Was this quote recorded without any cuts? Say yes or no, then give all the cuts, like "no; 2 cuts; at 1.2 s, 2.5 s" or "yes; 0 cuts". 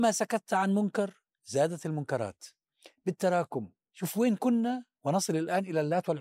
yes; 0 cuts